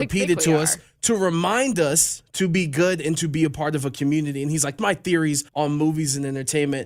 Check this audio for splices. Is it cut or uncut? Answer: cut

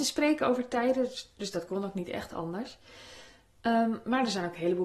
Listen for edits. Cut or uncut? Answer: uncut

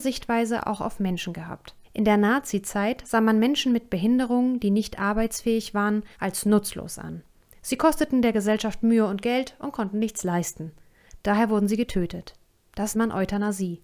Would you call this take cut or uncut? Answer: cut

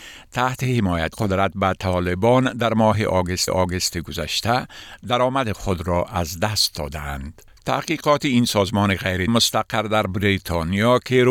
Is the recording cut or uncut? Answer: cut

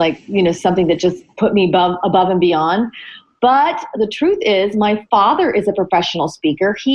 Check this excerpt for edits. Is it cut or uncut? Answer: uncut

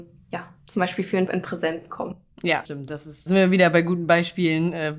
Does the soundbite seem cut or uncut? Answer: cut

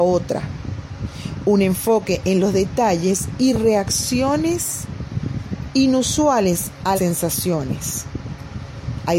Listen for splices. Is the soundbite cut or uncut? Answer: cut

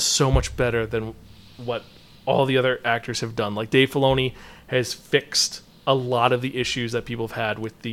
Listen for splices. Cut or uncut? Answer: uncut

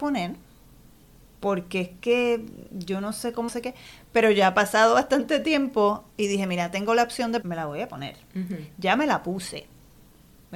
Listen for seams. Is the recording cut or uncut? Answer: cut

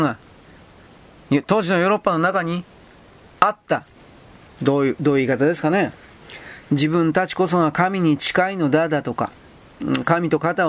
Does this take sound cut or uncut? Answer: uncut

